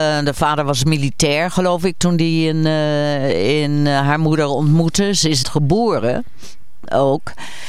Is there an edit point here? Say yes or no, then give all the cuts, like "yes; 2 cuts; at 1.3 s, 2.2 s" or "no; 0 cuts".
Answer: yes; 1 cut; at 5.4 s